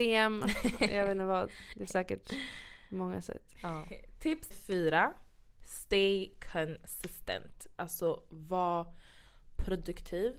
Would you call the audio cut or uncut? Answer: cut